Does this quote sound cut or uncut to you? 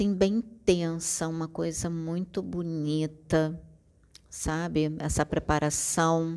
uncut